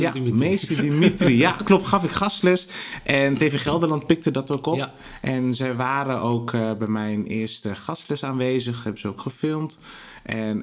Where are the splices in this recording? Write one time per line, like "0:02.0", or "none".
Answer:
none